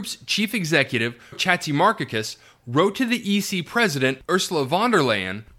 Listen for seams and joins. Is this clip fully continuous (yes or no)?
no